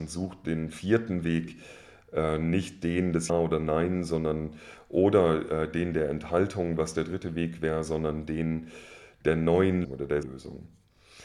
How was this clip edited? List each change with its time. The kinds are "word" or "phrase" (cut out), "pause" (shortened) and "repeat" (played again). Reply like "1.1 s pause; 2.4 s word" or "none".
3.3 s word; 9.8 s word; 10.2 s phrase

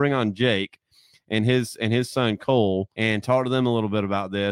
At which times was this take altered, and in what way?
2.9 s pause

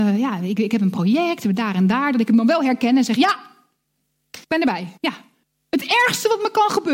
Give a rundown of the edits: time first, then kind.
4.4 s pause; 5.0 s pause

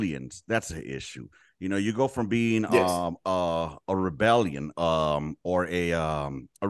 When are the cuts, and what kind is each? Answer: none

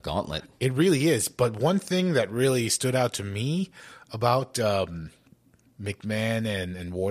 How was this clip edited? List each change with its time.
none

